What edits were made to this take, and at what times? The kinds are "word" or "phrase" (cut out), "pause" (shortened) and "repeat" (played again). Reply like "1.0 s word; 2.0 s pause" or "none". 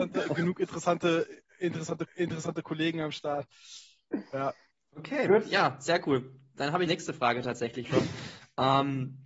2.1 s repeat; 4.7 s pause; 6.9 s phrase; 7.8 s word

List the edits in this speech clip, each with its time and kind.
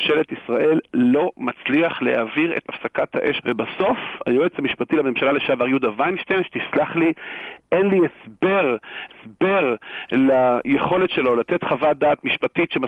2.6 s word; 3.4 s word; 9.1 s repeat

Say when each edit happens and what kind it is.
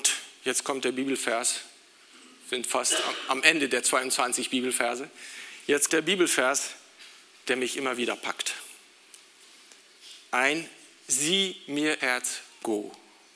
5.9 s word; 12.0 s word

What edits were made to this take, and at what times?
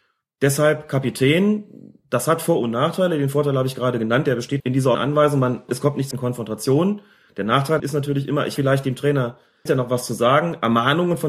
4.6 s word; 4.9 s word; 5.7 s word; 6.1 s word; 7.8 s word; 8.6 s word; 9.7 s word

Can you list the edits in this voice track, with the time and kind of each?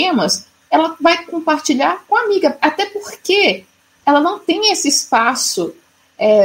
none

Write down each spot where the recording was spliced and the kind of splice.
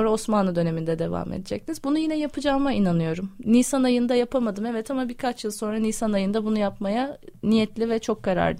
none

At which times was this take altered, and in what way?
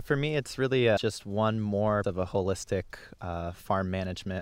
1.0 s phrase; 2.0 s word

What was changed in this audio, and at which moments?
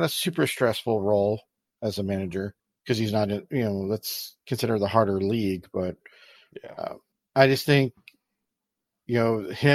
2.6 s pause; 7.1 s pause

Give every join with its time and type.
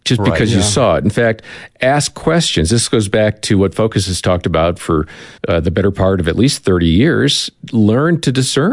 5.4 s pause

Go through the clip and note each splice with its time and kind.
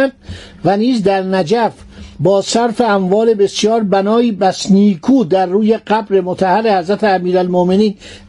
2.1 s pause

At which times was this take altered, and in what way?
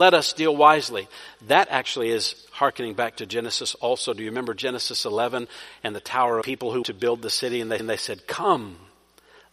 6.4 s phrase; 6.8 s word; 7.8 s repeat

